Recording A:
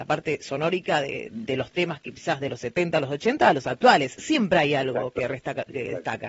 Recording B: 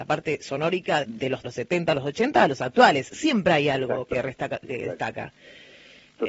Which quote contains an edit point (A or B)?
B